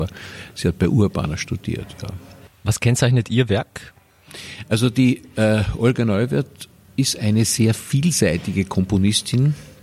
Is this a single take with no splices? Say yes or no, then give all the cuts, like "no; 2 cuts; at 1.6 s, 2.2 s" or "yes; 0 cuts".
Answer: yes; 0 cuts